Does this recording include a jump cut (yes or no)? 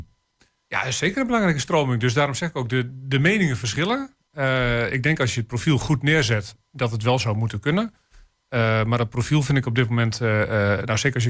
no